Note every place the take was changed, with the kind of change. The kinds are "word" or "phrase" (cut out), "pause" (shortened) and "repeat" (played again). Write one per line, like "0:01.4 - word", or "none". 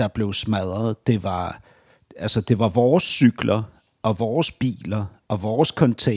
none